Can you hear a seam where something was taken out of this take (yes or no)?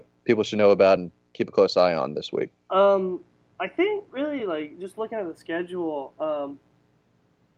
no